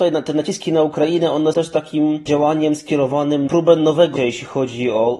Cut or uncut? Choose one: cut